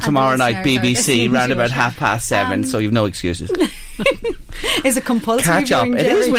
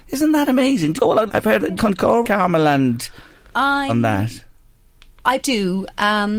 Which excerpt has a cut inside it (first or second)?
second